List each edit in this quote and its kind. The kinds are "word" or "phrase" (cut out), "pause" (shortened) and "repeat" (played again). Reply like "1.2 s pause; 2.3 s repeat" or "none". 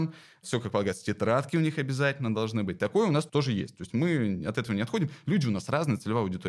none